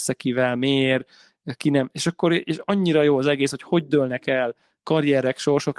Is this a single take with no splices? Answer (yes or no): yes